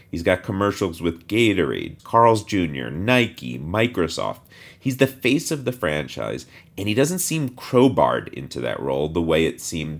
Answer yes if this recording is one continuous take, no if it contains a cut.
no